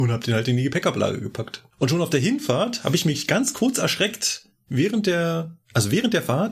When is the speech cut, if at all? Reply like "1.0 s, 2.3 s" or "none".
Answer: 1.7 s